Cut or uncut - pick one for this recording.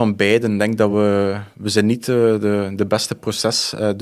uncut